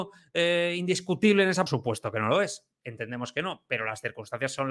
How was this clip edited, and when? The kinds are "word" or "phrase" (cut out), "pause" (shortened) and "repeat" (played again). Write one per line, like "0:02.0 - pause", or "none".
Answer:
0:01.7 - phrase